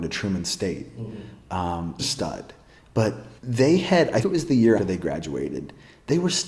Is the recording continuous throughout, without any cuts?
no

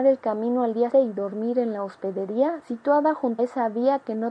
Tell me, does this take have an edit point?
yes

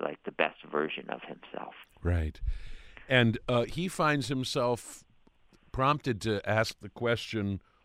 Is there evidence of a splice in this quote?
no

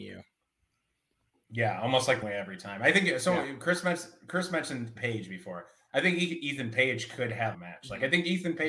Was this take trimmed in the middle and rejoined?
yes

